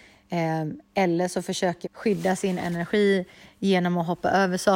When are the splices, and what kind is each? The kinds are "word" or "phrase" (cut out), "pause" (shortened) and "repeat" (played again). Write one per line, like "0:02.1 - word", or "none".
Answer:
0:01.8 - word